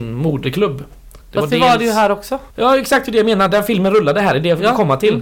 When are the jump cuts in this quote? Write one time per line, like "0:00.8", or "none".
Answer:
0:01.2
0:02.5